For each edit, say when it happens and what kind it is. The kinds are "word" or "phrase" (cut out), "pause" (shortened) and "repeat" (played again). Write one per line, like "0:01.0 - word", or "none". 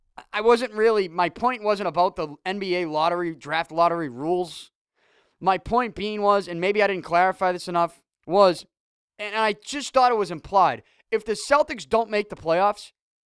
none